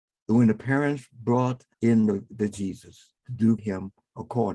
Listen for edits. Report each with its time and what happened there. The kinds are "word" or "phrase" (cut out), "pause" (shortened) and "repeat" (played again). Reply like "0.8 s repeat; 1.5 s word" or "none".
1.7 s pause; 2.5 s word; 3.2 s pause; 3.6 s word